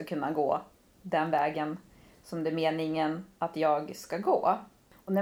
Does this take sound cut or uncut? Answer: uncut